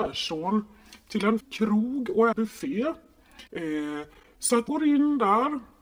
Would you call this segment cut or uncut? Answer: cut